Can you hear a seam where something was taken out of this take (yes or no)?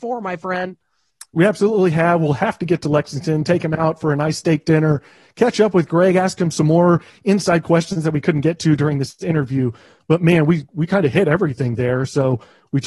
no